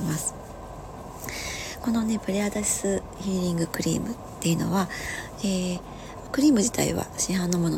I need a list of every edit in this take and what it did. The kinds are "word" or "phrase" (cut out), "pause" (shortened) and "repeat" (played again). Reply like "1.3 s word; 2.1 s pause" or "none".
6.3 s phrase